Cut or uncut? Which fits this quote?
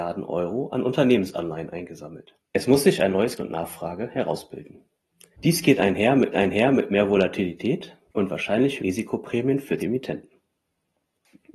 cut